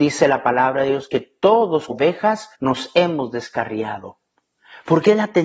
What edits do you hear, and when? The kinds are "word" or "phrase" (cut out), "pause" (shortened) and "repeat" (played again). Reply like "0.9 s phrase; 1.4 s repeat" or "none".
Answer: 1.9 s word; 2.5 s pause